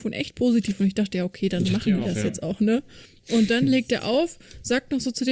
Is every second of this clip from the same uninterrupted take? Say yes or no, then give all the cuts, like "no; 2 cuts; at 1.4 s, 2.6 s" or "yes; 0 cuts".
yes; 0 cuts